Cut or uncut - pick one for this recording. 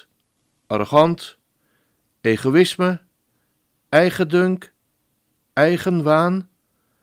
uncut